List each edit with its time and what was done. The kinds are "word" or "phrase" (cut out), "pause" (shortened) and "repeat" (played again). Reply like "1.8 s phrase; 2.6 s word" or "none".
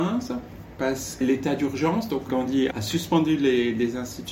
1.2 s phrase; 2.3 s word; 2.7 s word